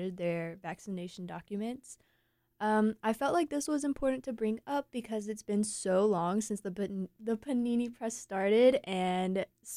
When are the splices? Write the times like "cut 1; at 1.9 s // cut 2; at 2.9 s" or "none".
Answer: none